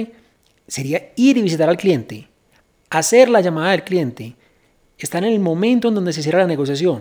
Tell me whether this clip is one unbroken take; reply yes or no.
yes